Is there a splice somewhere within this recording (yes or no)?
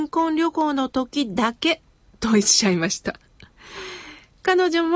yes